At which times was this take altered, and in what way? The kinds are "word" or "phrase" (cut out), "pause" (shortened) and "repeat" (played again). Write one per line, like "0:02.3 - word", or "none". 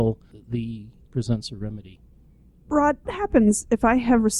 0:01.0 - word
0:03.0 - word